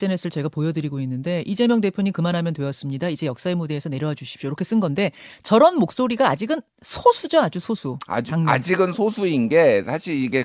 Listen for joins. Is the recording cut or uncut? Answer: uncut